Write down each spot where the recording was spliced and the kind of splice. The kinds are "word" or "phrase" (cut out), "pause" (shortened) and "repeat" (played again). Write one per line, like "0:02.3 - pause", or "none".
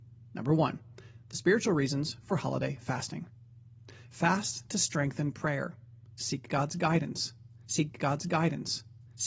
0:07.9 - repeat